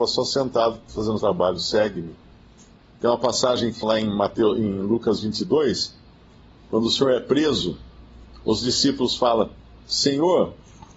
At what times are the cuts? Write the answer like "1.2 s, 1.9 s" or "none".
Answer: 1.2 s, 3.8 s